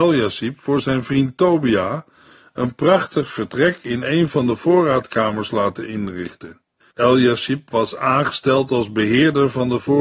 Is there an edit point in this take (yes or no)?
yes